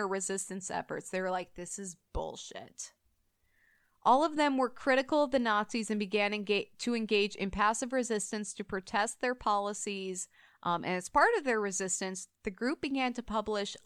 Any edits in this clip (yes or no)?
no